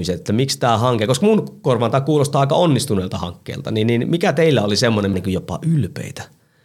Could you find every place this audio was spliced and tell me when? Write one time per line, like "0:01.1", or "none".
0:05.1